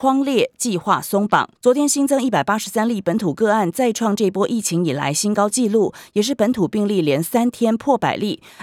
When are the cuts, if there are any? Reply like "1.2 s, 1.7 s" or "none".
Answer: 1.6 s